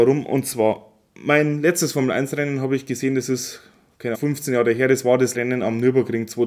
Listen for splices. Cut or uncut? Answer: cut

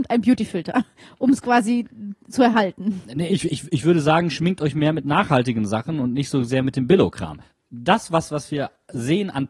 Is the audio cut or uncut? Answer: uncut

